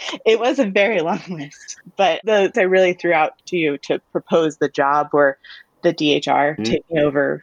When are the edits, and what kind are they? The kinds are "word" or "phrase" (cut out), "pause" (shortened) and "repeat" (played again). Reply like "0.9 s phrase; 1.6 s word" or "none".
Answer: 2.5 s word; 3.4 s pause

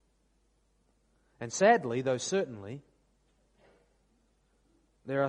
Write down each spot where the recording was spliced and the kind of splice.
none

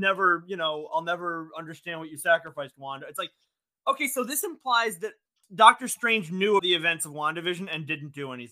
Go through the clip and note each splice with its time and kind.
6.6 s word

